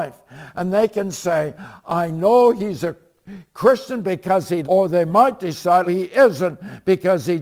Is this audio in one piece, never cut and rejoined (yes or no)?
no